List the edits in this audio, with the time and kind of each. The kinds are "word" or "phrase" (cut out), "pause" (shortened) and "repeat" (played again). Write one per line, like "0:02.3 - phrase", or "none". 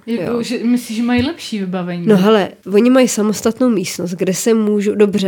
0:02.6 - pause